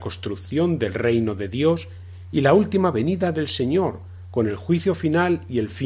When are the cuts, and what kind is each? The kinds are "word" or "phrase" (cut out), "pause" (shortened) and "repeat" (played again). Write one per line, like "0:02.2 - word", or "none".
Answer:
none